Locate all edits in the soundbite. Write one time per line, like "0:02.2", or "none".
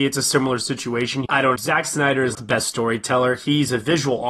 0:01.3
0:01.6
0:02.3